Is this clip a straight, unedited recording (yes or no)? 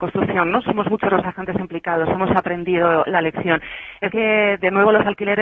no